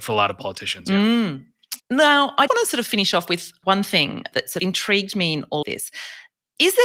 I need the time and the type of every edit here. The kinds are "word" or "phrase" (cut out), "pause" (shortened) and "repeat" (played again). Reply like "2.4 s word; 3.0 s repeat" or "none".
1.8 s pause; 2.5 s word; 4.6 s phrase; 5.6 s word